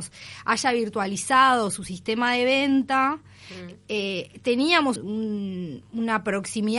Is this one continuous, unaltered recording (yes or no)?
no